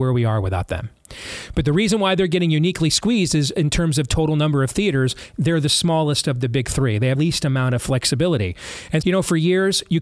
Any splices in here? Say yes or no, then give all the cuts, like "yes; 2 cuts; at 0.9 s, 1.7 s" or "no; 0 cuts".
yes; 2 cuts; at 7.1 s, 9.0 s